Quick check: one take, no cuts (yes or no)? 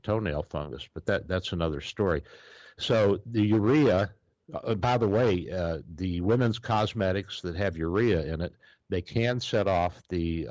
yes